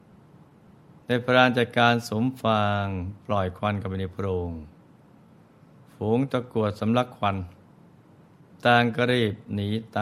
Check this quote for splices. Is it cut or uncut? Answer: uncut